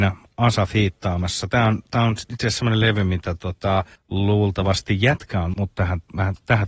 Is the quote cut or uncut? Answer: cut